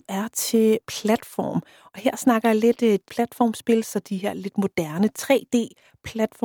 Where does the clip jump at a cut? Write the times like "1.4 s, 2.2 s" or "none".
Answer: 3.1 s